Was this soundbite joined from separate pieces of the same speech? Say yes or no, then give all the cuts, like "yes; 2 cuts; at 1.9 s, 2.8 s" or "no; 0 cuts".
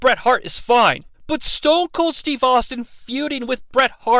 yes; 1 cut; at 1.1 s